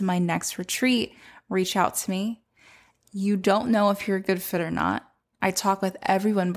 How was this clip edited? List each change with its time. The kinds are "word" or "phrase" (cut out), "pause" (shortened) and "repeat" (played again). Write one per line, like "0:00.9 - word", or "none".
none